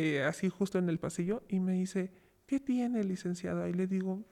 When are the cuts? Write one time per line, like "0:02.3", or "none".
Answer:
none